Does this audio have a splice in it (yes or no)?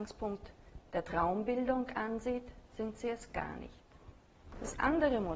no